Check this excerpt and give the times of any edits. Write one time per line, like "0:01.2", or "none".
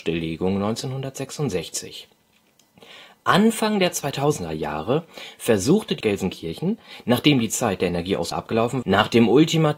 0:06.0
0:08.3
0:08.8